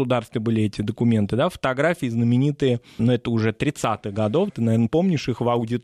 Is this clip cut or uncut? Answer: cut